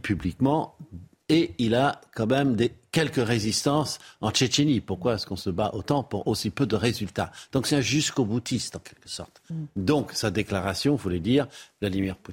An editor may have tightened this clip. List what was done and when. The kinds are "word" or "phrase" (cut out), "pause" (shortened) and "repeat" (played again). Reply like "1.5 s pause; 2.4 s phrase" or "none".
none